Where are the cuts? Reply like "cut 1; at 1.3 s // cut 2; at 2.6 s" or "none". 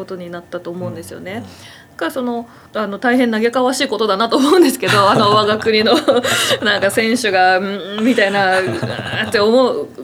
cut 1; at 2.7 s